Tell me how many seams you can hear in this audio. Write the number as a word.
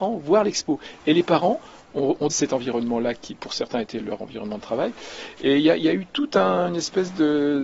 one